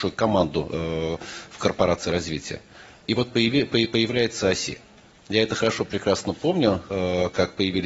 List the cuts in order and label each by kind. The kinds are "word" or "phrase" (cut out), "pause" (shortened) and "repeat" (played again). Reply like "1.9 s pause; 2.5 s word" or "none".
none